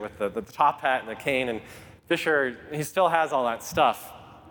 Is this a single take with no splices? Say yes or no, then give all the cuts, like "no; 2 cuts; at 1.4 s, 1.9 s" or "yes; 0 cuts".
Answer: yes; 0 cuts